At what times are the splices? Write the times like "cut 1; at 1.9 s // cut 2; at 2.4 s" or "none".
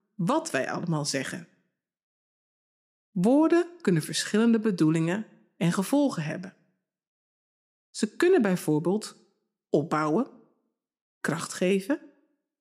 none

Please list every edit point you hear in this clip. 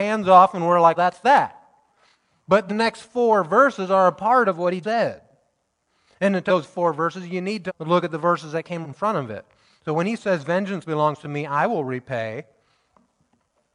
cut 1; at 1.0 s // cut 2; at 2.7 s // cut 3; at 4.8 s // cut 4; at 6.5 s // cut 5; at 7.7 s // cut 6; at 8.8 s

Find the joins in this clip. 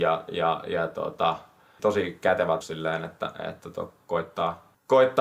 cut 1; at 2.6 s

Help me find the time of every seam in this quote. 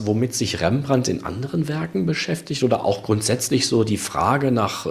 none

